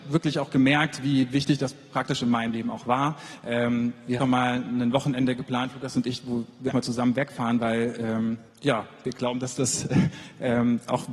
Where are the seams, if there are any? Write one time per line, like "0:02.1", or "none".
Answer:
0:04.2
0:06.7
0:08.5